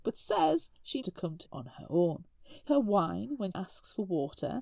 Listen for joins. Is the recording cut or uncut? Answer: cut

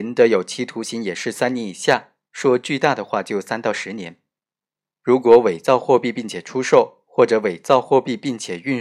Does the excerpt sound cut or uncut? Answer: uncut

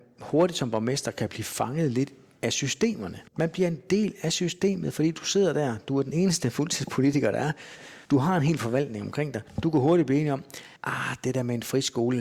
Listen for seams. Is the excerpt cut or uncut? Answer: cut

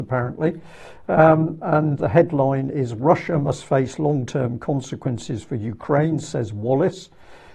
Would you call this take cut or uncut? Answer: cut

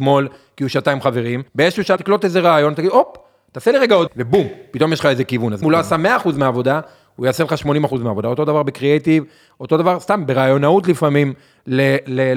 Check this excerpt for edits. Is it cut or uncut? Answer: cut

